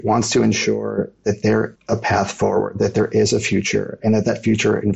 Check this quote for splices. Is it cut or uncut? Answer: cut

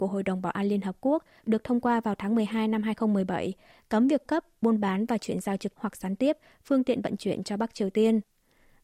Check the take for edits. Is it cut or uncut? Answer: cut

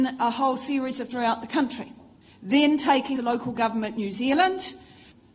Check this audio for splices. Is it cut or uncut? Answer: cut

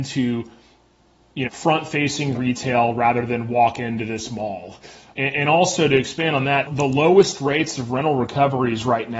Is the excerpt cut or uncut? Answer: cut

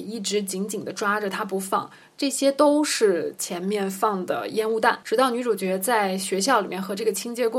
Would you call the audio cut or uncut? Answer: uncut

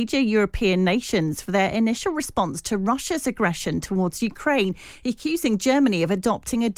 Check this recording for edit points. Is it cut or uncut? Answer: uncut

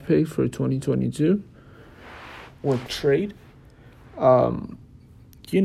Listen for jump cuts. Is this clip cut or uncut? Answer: cut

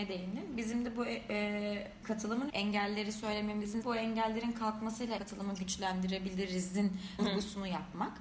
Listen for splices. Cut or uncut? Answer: cut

